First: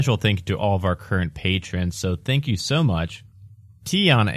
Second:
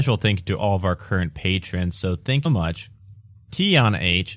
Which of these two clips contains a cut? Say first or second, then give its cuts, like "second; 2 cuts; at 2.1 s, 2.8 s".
second; 1 cut; at 2.4 s